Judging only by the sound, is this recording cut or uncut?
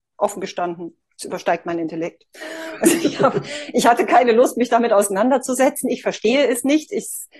uncut